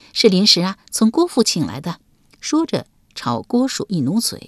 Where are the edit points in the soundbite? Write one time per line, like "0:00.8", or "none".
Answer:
0:02.1